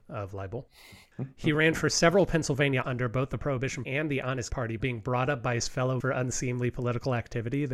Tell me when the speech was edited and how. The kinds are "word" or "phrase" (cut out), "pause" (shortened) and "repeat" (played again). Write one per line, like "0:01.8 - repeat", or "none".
0:02.8 - word
0:03.8 - word
0:04.5 - word
0:04.8 - word
0:06.0 - word